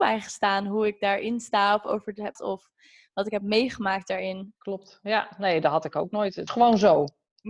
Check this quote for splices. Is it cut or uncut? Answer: cut